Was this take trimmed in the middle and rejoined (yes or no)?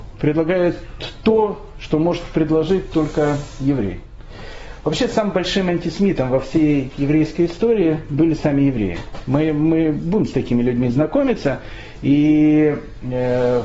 no